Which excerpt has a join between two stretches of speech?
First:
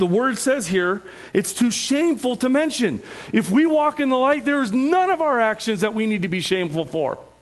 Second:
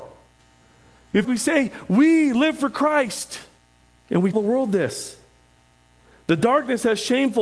second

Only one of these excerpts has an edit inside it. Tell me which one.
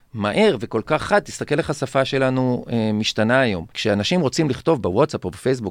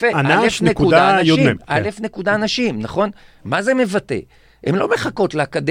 first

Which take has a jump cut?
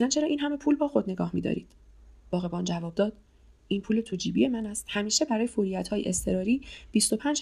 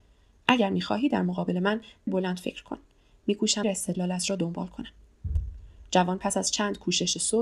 second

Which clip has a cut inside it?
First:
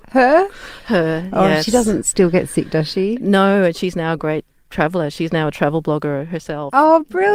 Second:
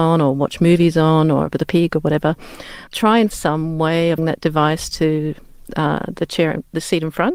second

